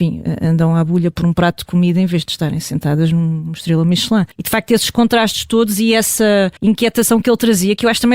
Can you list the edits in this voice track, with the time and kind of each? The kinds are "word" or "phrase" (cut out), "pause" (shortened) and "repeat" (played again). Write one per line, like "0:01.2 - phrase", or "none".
0:04.3 - pause
0:06.6 - pause

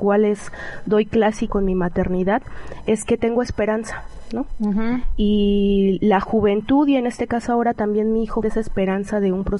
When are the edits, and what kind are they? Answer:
0:01.5 - phrase
0:08.4 - word

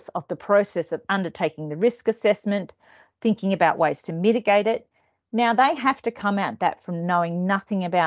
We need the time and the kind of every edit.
none

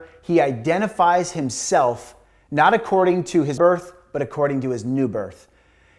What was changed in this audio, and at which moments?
0:03.6 - word

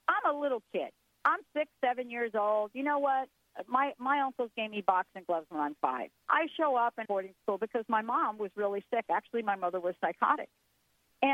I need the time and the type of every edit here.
0:06.2 - pause
0:07.0 - phrase

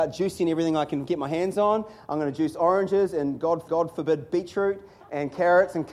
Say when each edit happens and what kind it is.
0:03.7 - repeat

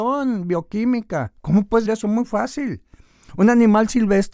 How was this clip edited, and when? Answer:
0:01.4 - pause
0:01.8 - word

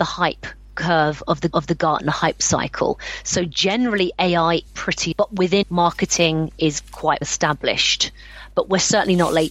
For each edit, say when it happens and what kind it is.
0:01.5 - repeat
0:04.7 - word
0:05.1 - word
0:05.6 - word
0:07.2 - word

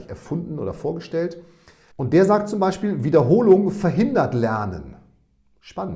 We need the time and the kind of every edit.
0:01.9 - pause

